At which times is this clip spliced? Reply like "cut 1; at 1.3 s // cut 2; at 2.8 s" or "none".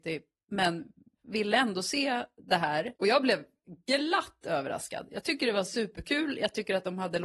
cut 1; at 3.0 s